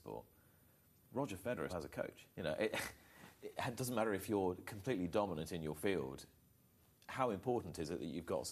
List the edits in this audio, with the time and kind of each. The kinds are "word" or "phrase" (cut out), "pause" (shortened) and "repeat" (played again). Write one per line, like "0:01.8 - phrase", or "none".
0:01.7 - word
0:02.3 - pause

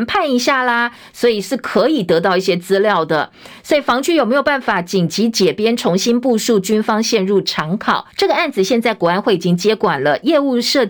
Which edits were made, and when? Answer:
0:08.1 - pause

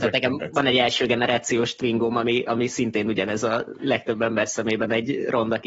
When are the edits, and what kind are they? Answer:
none

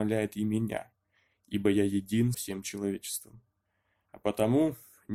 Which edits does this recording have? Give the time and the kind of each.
0:02.3 - word

